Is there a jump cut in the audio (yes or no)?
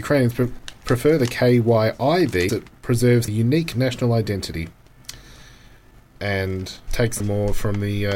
yes